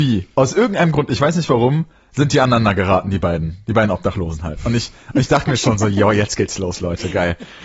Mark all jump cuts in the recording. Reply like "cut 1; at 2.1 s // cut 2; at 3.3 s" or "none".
none